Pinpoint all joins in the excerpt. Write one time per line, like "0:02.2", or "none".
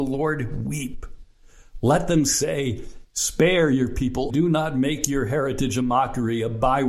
0:04.3